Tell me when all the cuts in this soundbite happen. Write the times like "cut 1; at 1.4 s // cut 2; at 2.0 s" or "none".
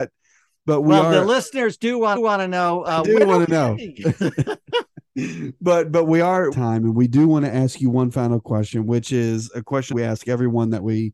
cut 1; at 2.2 s // cut 2; at 6.5 s // cut 3; at 9.9 s